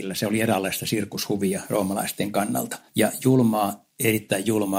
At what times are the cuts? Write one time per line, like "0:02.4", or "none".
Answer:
0:02.9